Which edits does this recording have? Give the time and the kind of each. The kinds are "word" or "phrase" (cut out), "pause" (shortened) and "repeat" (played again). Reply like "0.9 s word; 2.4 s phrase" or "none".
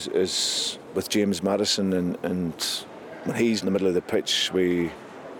3.6 s word